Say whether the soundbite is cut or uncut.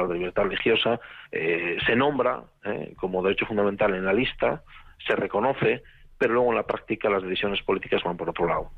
cut